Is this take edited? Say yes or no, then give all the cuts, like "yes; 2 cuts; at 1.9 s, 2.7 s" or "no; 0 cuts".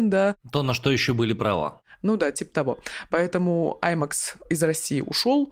no; 0 cuts